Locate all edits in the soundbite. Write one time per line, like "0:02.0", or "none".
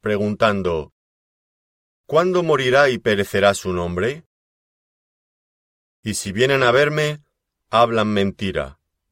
none